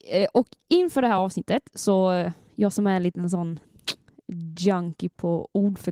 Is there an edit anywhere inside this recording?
no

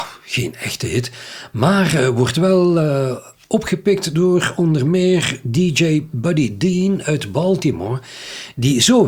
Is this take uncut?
yes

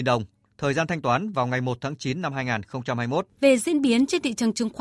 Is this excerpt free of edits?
no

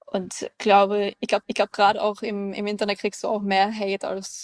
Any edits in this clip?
yes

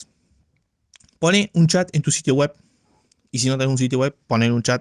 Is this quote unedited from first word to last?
yes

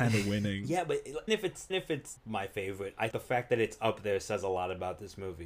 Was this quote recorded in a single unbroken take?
no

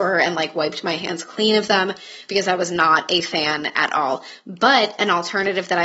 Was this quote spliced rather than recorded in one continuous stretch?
no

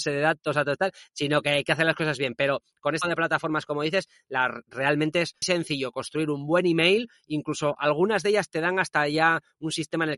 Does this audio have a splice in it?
yes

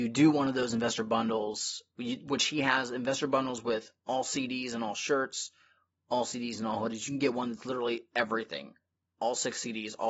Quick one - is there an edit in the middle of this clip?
no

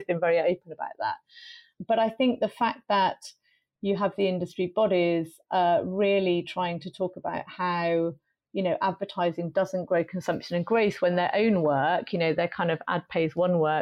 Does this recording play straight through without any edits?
yes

